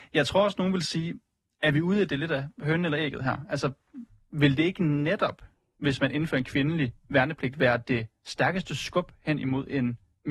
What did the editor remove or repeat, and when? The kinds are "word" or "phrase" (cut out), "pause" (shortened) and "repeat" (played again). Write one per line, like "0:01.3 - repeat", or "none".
none